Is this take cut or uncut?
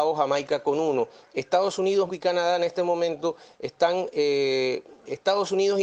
cut